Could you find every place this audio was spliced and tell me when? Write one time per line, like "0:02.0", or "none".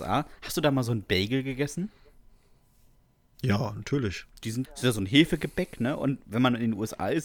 0:04.6
0:06.2